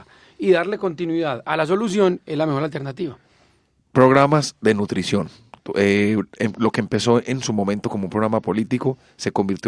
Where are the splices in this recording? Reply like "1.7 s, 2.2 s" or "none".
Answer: none